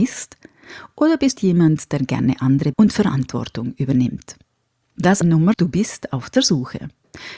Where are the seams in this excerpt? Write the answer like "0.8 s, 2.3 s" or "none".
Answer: 1.4 s, 2.7 s, 5.2 s, 5.5 s